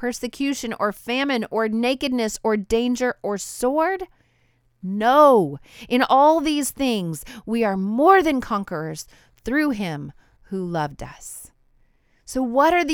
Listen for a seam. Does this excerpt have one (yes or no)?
no